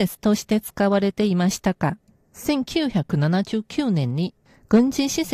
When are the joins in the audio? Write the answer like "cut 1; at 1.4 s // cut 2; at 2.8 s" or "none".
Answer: none